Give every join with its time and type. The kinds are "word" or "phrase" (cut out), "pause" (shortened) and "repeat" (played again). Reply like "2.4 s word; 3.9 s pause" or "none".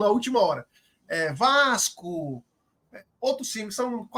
3.1 s pause